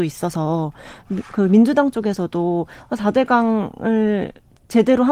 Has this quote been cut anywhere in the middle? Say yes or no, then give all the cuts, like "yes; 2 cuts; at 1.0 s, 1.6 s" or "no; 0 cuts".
no; 0 cuts